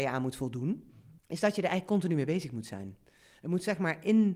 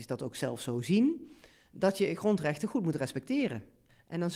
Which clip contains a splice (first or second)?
first